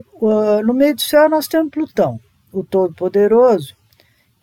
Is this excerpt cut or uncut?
uncut